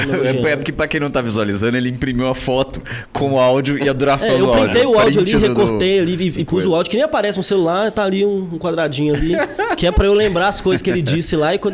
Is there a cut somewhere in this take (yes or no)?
no